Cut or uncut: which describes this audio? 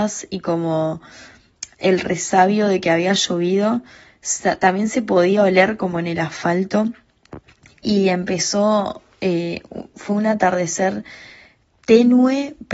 uncut